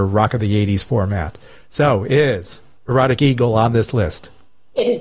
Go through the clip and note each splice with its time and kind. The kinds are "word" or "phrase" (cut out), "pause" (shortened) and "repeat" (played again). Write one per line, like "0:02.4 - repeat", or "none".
none